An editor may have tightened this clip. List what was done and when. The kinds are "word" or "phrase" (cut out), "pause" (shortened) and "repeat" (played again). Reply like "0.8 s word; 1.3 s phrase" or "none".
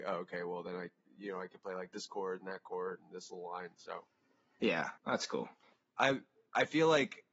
5.0 s pause; 5.6 s pause